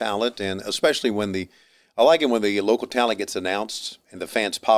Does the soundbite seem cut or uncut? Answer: uncut